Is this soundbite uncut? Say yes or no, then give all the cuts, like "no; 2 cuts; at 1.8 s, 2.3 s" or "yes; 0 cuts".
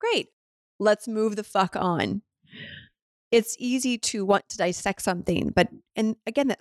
yes; 0 cuts